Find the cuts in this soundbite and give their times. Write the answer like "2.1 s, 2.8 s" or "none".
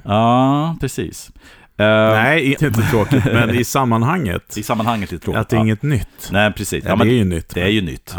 2.6 s